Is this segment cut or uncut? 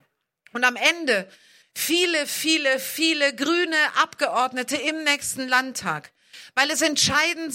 cut